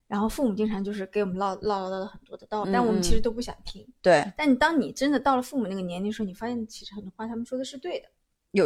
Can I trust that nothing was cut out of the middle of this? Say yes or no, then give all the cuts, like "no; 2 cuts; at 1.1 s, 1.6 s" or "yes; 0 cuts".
no; 1 cut; at 2.6 s